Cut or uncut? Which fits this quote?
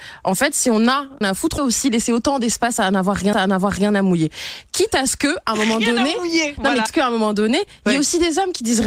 cut